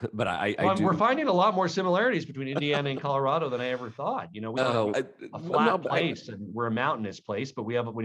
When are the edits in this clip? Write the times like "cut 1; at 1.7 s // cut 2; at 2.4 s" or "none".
cut 1; at 4.6 s // cut 2; at 4.9 s